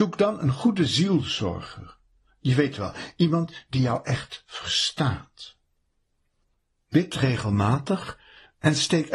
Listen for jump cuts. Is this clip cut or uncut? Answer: uncut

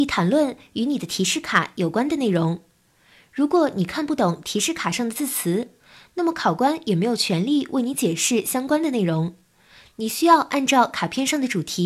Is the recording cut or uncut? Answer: uncut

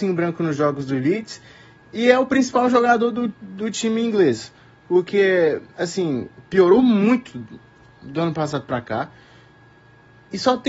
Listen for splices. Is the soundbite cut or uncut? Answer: cut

